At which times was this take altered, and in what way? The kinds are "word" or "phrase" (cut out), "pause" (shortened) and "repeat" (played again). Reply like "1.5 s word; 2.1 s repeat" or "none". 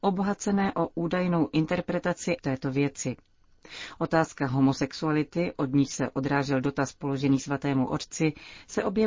2.4 s phrase